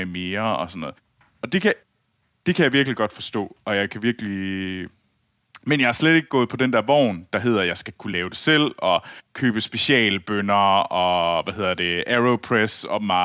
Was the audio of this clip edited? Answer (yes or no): no